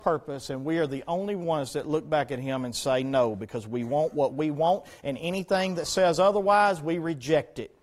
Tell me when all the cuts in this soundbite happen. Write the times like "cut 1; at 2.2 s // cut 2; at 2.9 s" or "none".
none